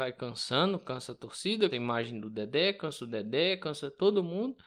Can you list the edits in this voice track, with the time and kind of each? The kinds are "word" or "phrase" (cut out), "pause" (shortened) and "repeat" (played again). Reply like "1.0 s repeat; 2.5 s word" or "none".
1.7 s word